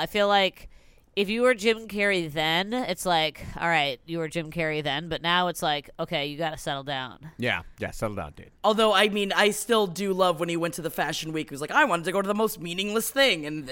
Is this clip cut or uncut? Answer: cut